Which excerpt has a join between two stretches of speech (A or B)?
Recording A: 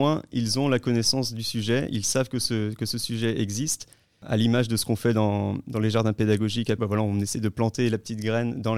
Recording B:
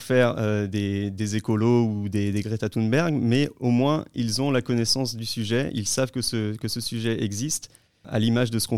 A